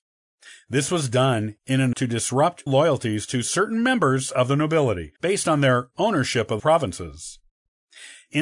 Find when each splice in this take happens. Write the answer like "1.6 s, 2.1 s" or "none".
1.9 s, 2.7 s, 5.2 s, 6.6 s

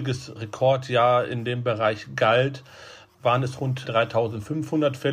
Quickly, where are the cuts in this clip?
none

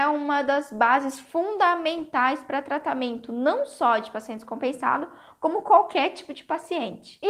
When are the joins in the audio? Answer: none

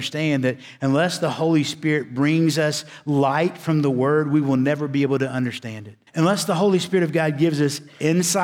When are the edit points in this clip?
6.1 s

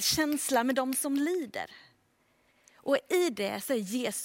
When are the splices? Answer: none

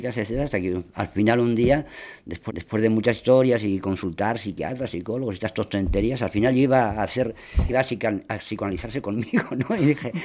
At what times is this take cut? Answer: 2.5 s, 7.7 s

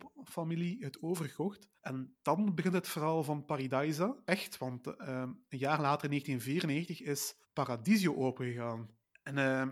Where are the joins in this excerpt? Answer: 1.8 s, 7.4 s

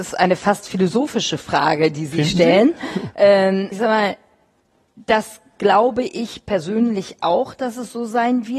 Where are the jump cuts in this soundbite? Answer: 3.7 s

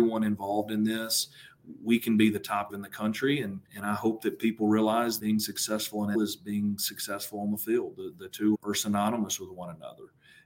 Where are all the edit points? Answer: 2.7 s, 3.7 s, 5.2 s, 6.1 s, 8.5 s

